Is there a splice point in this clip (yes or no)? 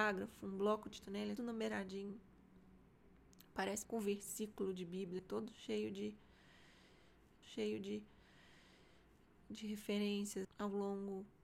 yes